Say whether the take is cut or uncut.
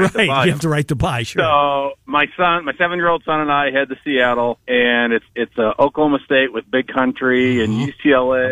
cut